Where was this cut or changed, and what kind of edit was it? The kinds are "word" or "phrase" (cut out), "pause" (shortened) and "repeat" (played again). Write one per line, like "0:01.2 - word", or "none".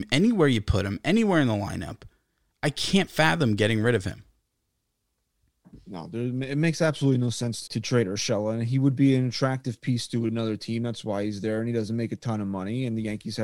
0:07.7 - word